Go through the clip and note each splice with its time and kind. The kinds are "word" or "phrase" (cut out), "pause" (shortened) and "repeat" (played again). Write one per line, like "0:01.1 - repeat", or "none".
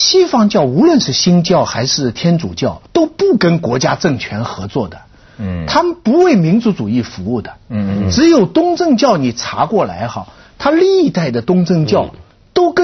0:02.9 - pause